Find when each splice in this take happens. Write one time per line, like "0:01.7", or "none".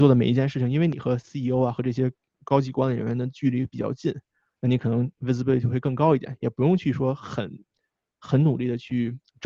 none

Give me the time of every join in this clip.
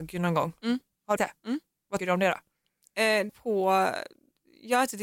0:01.2
0:02.0
0:03.3

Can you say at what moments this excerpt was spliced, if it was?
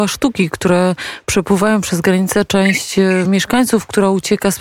none

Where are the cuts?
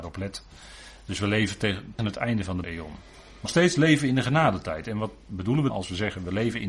0:02.0
0:02.6
0:03.5
0:05.7

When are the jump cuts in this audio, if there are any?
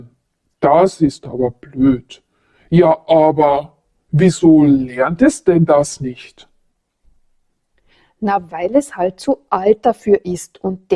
none

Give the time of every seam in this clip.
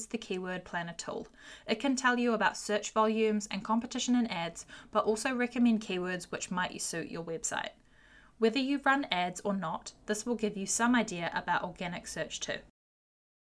none

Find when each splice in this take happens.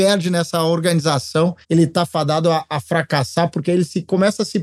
0:01.6

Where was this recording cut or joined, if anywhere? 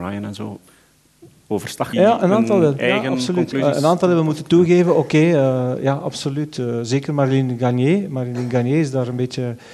0:01.9

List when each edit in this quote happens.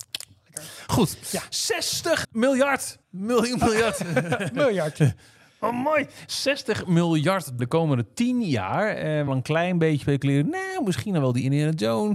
0:02.2
0:03.0
0:07.6
0:09.3
0:10.0

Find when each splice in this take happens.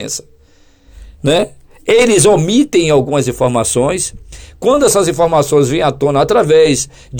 none

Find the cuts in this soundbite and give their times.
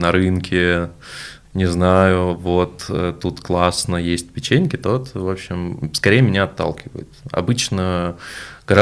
none

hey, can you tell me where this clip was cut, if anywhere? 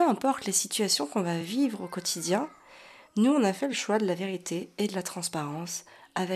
none

